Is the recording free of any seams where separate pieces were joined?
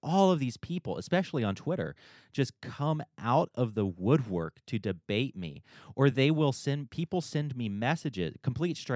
yes; 0 cuts

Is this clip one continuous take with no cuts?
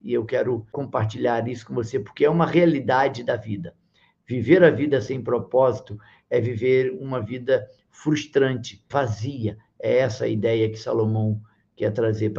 yes; 0 cuts

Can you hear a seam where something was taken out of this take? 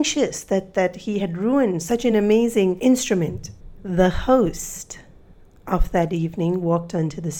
no; 0 cuts

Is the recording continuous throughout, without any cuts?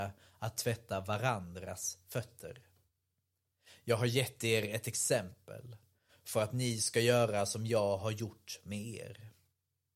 yes; 0 cuts

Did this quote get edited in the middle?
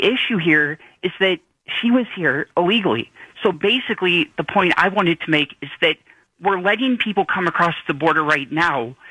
no; 0 cuts

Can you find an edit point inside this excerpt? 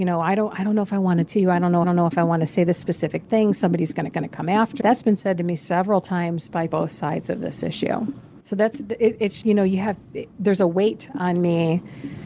yes; 7 cuts; at 1.3 s, 1.8 s, 4.1 s, 4.8 s, 6.7 s, 8.4 s, 9.4 s

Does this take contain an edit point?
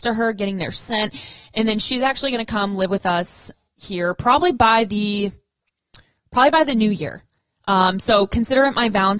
no; 0 cuts

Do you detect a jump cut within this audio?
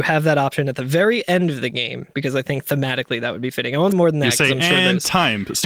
yes; 1 cut; at 3.9 s

